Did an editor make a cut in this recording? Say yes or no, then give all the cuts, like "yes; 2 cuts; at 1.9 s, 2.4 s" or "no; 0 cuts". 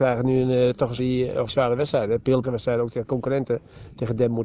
yes; 3 cuts; at 1.0 s, 1.5 s, 2.4 s